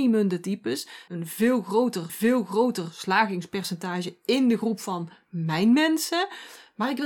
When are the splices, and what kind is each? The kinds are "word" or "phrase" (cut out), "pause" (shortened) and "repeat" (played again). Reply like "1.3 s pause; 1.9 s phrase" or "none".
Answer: 1.1 s phrase; 2.1 s repeat